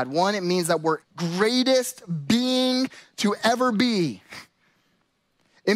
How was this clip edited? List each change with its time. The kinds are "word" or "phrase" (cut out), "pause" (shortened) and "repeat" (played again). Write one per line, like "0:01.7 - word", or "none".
0:01.0 - phrase

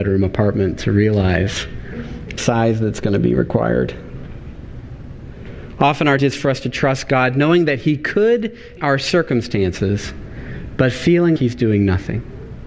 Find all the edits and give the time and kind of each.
0:02.4 - word
0:06.2 - word
0:08.8 - word
0:11.4 - word

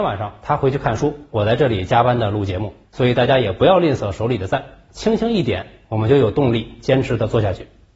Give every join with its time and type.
0:02.8 - pause

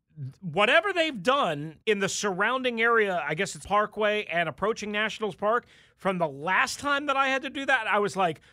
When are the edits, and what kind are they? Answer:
0:01.8 - pause
0:03.6 - word

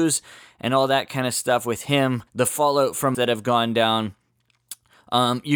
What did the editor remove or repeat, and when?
0:02.3 - pause
0:03.1 - word

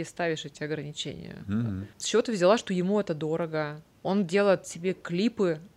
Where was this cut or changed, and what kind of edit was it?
0:01.9 - pause

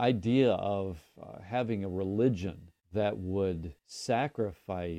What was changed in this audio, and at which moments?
0:02.8 - pause
0:03.8 - pause

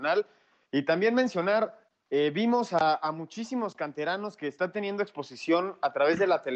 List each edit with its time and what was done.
none

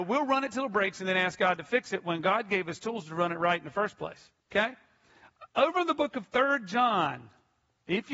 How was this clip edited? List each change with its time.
0:04.4 - pause

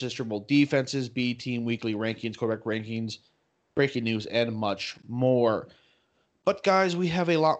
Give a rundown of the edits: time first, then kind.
none

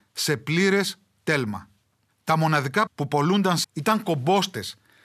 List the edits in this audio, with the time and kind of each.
0:02.9 - word
0:03.6 - word

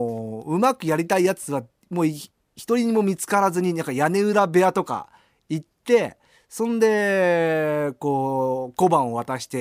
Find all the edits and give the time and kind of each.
none

